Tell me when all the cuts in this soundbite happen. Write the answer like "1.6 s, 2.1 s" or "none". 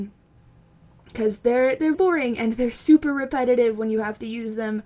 1.9 s